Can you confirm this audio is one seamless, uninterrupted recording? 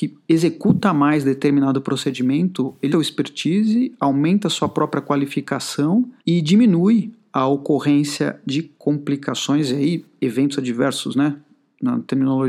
no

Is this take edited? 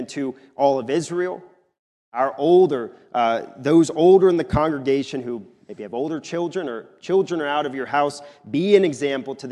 no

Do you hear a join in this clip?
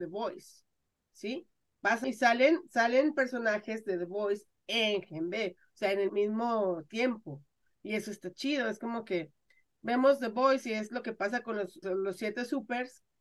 yes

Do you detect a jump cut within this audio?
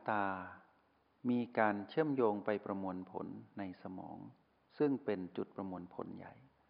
yes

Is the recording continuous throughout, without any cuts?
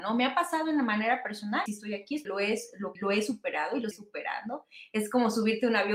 no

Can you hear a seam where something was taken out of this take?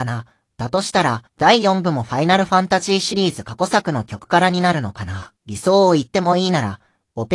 yes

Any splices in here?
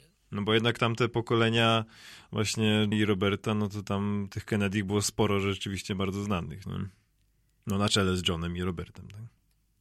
yes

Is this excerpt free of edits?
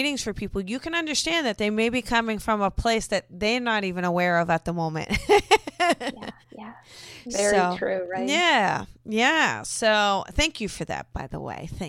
no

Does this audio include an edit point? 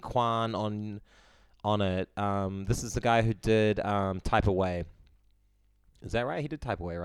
no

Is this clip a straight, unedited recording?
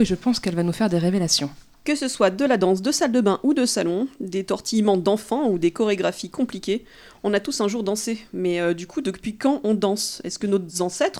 yes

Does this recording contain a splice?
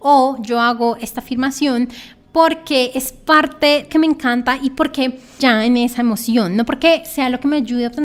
yes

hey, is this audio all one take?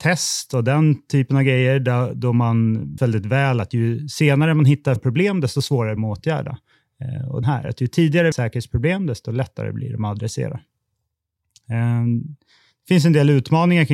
no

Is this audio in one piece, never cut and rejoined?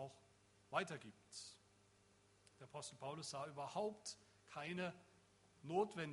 yes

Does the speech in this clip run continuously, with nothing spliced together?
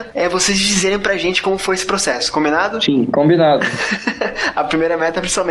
yes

